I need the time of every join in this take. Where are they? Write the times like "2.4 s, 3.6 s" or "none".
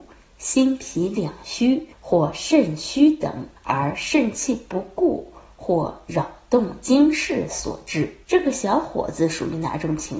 1.9 s, 3.6 s, 8.2 s

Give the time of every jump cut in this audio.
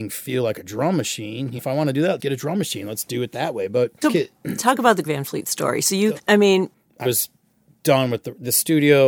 1.6 s, 2.2 s, 4.0 s, 5.1 s, 6.2 s, 7.0 s

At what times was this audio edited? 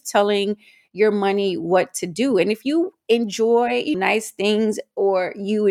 3.9 s

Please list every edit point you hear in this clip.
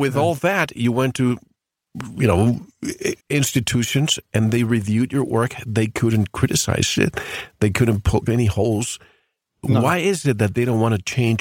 3.2 s

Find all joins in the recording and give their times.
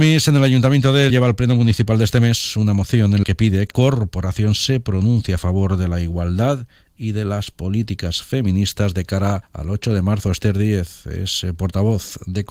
1.1 s, 3.2 s, 3.7 s, 9.4 s

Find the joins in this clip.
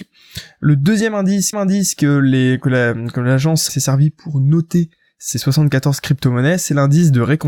1.5 s, 3.7 s

